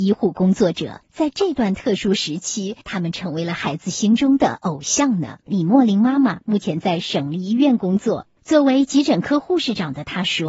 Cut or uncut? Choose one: cut